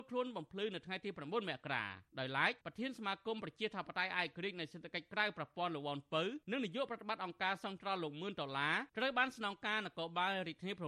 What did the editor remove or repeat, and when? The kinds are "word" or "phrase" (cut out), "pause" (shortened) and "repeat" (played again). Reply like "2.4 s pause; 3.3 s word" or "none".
2.1 s pause; 2.6 s pause; 6.4 s pause; 8.9 s pause